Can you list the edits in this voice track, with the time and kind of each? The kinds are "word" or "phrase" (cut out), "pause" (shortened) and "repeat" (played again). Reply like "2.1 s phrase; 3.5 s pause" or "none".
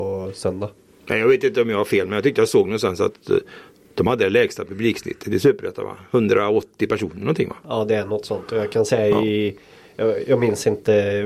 none